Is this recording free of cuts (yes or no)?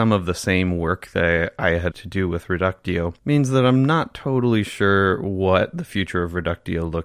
no